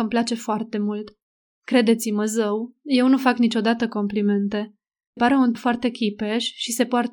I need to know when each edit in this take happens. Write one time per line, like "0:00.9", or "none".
0:05.2
0:05.5